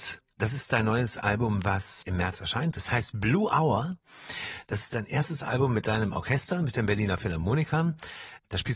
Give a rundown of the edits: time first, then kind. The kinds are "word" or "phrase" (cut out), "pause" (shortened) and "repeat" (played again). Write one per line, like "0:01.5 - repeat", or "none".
0:02.0 - word